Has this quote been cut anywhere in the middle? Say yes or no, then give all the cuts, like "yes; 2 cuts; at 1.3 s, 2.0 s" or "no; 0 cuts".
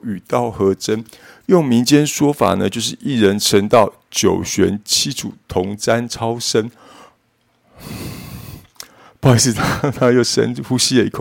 no; 0 cuts